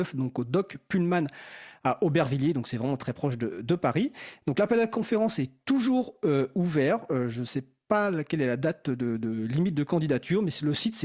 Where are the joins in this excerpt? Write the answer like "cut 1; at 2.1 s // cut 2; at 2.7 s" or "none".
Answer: none